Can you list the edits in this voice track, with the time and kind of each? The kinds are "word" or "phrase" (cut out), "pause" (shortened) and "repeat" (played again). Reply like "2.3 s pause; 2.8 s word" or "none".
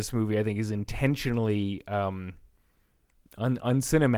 none